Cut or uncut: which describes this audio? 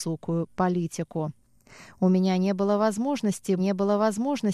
cut